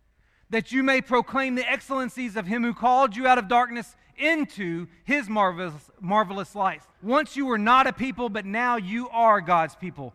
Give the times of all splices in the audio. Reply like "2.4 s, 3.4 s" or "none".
6.9 s